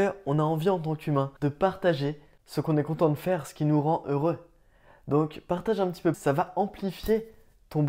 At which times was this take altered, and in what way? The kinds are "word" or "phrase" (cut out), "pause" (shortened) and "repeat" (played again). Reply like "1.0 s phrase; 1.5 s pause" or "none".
1.4 s pause; 6.1 s word